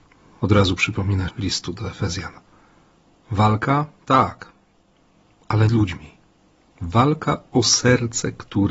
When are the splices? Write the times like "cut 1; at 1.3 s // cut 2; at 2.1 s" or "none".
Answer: cut 1; at 1.3 s // cut 2; at 5.7 s